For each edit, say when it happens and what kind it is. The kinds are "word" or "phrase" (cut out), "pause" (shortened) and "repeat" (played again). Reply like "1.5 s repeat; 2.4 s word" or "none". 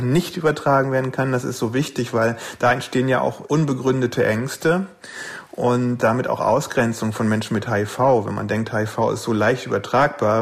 none